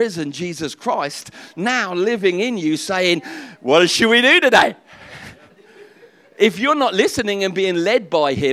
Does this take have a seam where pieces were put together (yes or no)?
no